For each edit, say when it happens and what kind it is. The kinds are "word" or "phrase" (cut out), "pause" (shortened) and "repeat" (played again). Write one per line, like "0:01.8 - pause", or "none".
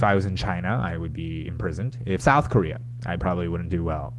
0:02.2 - phrase